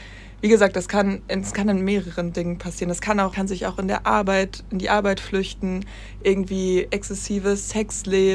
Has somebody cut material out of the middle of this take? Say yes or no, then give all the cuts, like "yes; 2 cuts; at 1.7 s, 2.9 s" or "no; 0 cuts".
yes; 1 cut; at 3.3 s